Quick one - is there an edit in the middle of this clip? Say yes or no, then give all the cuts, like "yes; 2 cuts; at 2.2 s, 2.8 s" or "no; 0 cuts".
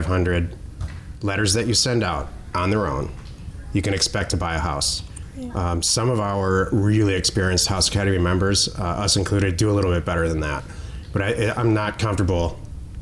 no; 0 cuts